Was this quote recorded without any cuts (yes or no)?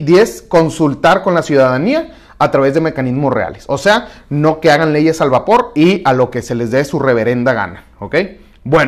yes